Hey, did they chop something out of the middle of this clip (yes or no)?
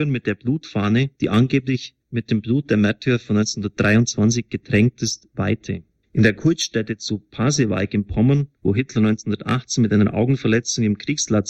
yes